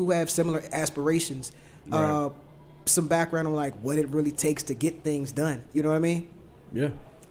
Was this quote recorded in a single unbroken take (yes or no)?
yes